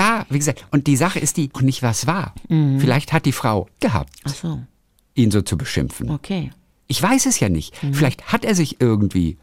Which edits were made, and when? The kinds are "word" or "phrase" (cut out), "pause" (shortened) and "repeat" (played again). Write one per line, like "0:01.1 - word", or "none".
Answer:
0:01.5 - phrase
0:03.8 - word

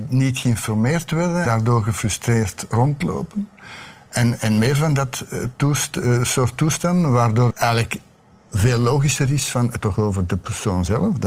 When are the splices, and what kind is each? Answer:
0:01.5 - word
0:07.5 - word
0:09.8 - word

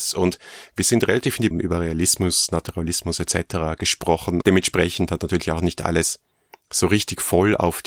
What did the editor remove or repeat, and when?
0:01.5 - phrase
0:04.4 - word

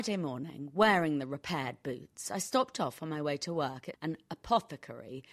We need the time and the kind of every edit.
0:03.9 - phrase

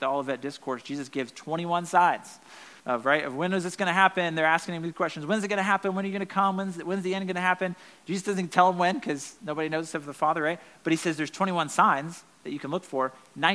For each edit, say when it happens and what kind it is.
0:02.8 - pause

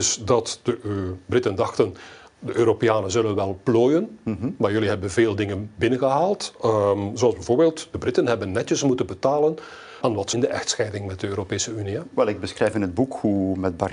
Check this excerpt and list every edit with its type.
0:10.0 - word
0:10.3 - phrase

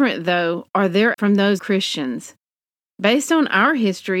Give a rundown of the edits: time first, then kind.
0:01.1 - word
0:01.6 - word

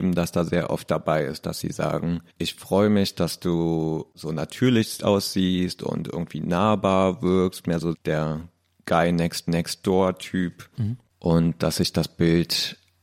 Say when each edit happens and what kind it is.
0:02.3 - pause
0:07.9 - word
0:09.5 - repeat
0:11.1 - pause

